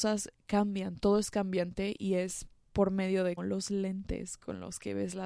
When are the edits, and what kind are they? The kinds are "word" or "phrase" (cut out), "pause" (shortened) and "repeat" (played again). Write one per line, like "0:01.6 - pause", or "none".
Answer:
0:03.4 - word